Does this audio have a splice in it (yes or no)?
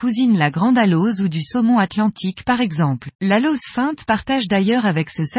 yes